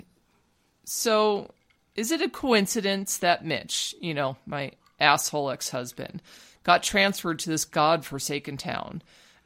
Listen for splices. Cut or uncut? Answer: uncut